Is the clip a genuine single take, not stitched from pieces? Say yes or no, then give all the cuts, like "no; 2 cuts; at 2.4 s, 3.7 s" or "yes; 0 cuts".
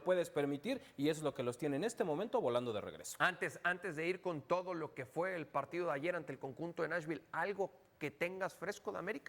yes; 0 cuts